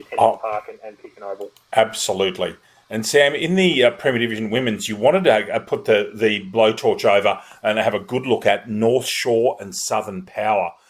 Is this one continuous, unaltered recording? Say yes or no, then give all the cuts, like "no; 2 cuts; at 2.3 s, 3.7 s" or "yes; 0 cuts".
yes; 0 cuts